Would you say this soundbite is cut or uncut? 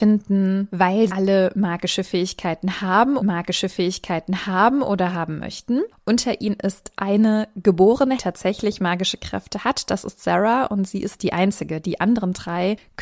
cut